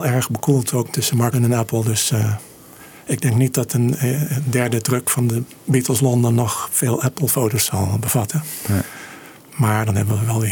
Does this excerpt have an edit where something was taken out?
yes; 1 cut; at 1.3 s

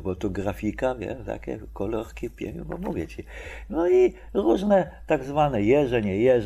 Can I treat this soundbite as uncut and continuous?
yes; 0 cuts

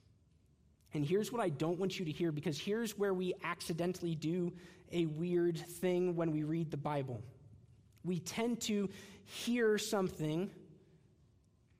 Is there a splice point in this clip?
no; 0 cuts

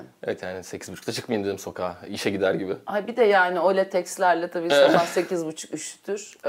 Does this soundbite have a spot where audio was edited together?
no; 0 cuts

